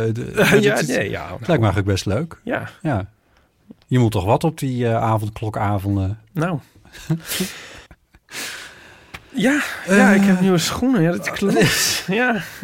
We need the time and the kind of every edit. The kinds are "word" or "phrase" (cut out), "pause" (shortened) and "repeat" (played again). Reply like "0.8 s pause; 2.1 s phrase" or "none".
3.8 s pause; 7.9 s pause